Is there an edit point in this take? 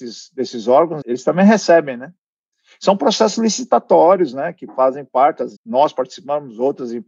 yes; 2 cuts; at 1.0 s, 5.6 s

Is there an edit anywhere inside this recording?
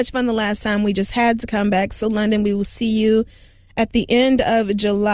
no; 0 cuts

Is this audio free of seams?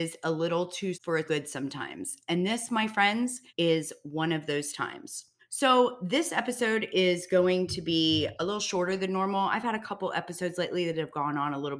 no; 5 cuts; at 0.9 s, 1.3 s, 3.5 s, 5.4 s, 8.4 s

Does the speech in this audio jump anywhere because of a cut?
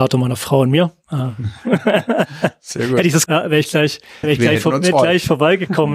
yes; 3 cuts; at 3.3 s, 4.2 s, 4.9 s

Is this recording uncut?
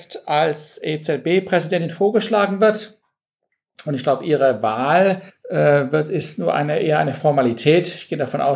no; 1 cut; at 5.3 s

